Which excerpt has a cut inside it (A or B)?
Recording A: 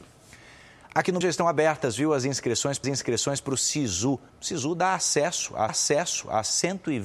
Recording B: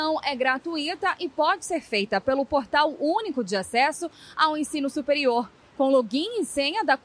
A